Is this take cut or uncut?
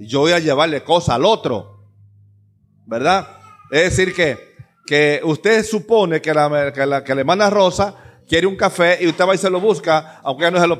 uncut